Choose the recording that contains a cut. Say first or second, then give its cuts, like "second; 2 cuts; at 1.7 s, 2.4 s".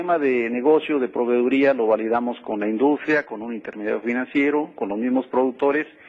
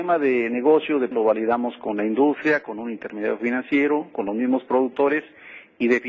second; 1 cut; at 1.1 s